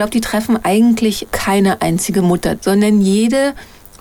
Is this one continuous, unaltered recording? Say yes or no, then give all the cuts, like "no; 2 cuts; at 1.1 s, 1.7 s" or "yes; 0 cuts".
no; 2 cuts; at 1.3 s, 2.6 s